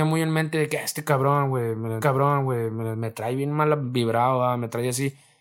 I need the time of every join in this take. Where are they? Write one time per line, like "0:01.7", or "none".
0:02.0